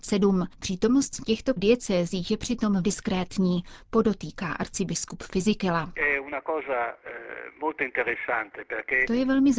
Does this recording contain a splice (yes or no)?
yes